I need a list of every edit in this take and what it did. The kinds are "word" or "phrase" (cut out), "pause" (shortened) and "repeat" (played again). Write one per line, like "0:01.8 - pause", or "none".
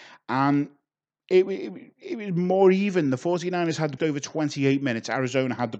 0:04.0 - phrase